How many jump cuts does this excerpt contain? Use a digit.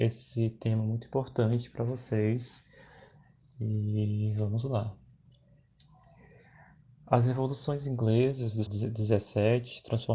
1